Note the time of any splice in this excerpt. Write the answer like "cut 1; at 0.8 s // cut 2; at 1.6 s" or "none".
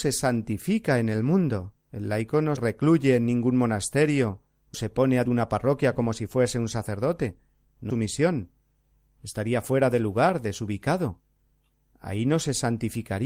cut 1; at 1.8 s // cut 2; at 2.6 s // cut 3; at 4.7 s // cut 4; at 5.2 s // cut 5; at 7.9 s